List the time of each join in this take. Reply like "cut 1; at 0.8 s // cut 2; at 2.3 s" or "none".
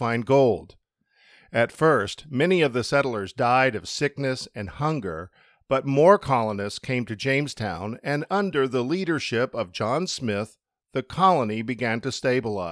none